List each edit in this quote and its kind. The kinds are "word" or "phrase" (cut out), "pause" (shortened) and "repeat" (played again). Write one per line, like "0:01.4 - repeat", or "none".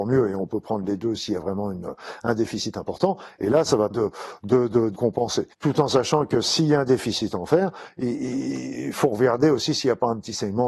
0:03.9 - word
0:04.9 - word
0:05.5 - pause